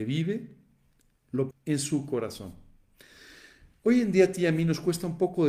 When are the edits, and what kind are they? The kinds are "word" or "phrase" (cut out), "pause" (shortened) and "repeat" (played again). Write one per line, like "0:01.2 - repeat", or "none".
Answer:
0:01.5 - word